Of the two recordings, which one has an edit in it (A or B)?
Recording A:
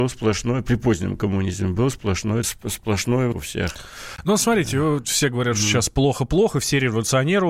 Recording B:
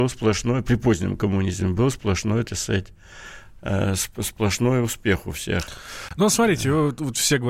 A